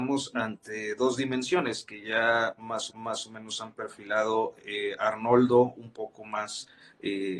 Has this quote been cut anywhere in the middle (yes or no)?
yes